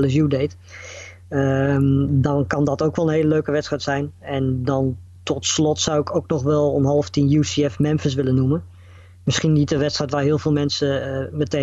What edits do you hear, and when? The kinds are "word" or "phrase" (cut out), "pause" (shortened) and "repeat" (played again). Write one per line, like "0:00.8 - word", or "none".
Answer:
none